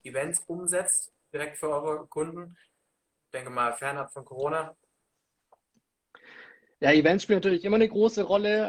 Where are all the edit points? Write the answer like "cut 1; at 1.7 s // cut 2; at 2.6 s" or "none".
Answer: none